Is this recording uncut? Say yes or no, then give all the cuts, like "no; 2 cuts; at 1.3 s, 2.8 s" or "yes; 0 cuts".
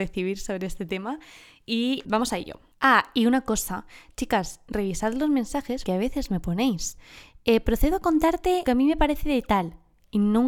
no; 4 cuts; at 2.0 s, 2.7 s, 5.9 s, 8.7 s